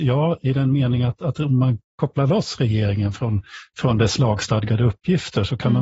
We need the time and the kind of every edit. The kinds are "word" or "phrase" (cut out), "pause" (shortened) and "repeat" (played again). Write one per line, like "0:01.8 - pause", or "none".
none